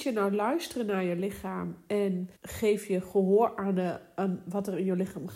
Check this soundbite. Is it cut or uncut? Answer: cut